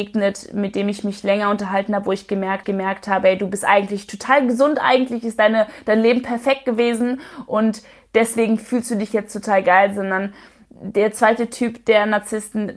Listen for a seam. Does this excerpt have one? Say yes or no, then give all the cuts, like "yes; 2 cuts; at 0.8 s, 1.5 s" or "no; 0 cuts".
yes; 1 cut; at 2.6 s